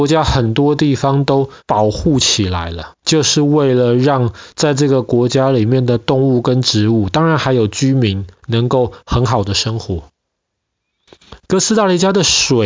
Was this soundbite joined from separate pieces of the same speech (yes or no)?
yes